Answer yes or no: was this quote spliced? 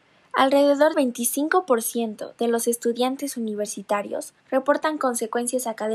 yes